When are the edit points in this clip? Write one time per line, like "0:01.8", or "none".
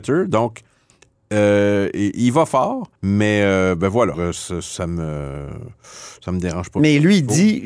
0:03.0
0:04.1